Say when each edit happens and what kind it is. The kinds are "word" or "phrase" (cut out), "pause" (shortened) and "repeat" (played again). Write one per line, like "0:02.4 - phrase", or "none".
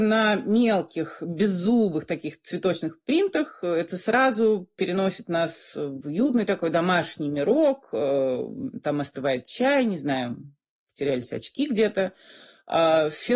none